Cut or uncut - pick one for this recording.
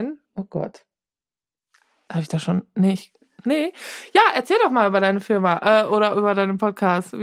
uncut